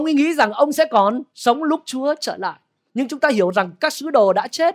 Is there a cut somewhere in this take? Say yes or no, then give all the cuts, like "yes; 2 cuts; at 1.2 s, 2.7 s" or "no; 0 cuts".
no; 0 cuts